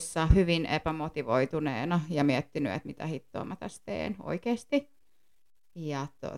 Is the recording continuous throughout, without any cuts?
yes; 0 cuts

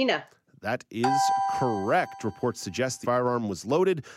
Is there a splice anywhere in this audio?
yes; 1 cut; at 3.0 s

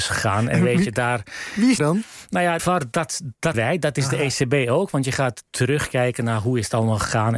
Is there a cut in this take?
yes; 4 cuts; at 1.8 s, 2.6 s, 3.5 s, 5.5 s

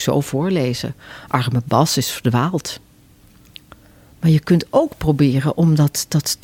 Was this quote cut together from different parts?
no; 0 cuts

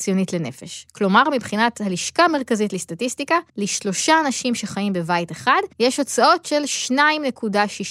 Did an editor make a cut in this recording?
yes; 2 cuts; at 3.5 s, 5.7 s

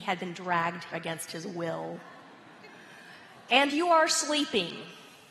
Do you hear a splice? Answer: yes; 2 cuts; at 0.9 s, 3.7 s

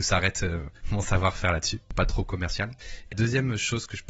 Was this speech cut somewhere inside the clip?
yes; 1 cut; at 3.1 s

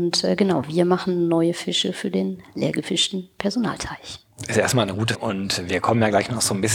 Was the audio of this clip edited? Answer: yes; 1 cut; at 5.1 s

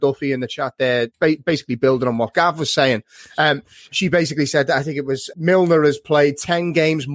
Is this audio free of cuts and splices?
no; 2 cuts; at 1.1 s, 5.3 s

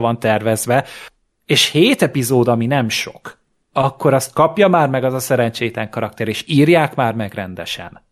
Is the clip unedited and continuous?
yes; 0 cuts

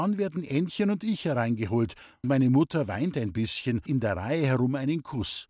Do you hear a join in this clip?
yes; 2 cuts; at 2.2 s, 3.9 s

